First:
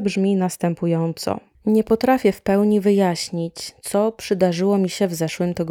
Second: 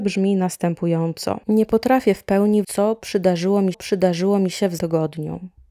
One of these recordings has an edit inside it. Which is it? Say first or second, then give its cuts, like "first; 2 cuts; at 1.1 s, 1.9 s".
second; 4 cuts; at 1.4 s, 2.6 s, 3.7 s, 4.8 s